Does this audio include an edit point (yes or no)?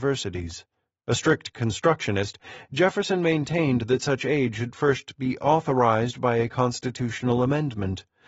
no